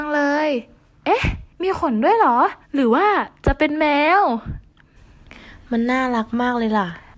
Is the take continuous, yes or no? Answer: no